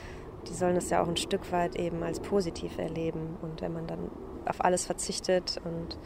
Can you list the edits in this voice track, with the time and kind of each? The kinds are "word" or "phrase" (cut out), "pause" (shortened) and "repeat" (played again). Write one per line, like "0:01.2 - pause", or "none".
0:04.4 - phrase